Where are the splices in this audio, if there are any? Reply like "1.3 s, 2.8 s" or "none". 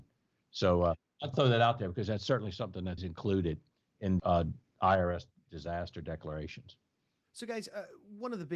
1.3 s, 3.0 s, 4.2 s